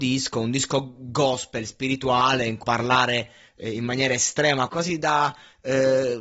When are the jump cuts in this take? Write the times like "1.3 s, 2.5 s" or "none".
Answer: 2.6 s, 4.7 s